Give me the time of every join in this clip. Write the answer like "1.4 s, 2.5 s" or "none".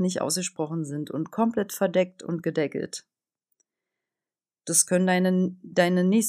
none